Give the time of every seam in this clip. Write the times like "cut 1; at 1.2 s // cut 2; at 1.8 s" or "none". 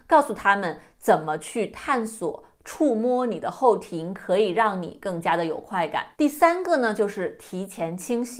cut 1; at 6.1 s